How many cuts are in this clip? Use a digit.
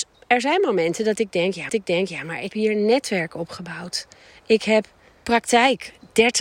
3